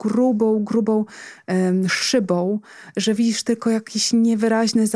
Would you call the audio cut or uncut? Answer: uncut